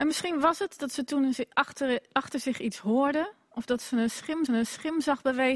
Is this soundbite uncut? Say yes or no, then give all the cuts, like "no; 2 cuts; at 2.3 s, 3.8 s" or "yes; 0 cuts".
no; 1 cut; at 4.5 s